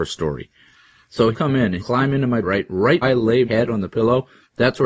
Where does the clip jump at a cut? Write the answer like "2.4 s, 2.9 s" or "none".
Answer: 1.3 s, 1.8 s, 2.4 s, 3.0 s, 3.5 s